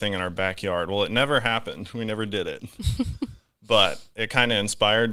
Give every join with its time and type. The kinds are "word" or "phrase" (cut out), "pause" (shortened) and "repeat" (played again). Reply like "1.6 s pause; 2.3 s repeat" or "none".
none